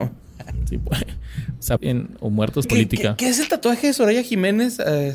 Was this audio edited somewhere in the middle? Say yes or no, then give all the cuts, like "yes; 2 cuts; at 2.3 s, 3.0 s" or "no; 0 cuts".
yes; 2 cuts; at 1.8 s, 2.6 s